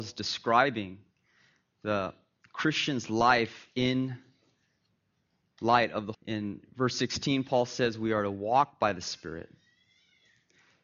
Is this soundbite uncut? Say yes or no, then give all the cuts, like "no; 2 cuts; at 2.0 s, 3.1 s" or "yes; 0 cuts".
no; 1 cut; at 6.1 s